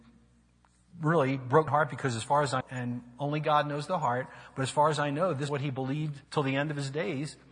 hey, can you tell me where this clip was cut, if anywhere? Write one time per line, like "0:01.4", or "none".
0:01.7
0:02.6
0:05.5
0:06.2

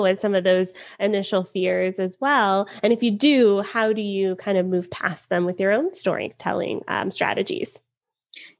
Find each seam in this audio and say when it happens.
none

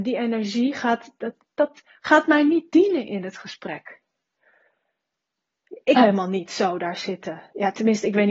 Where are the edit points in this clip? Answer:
0:06.0

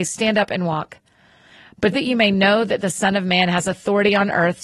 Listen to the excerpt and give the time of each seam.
0:01.9

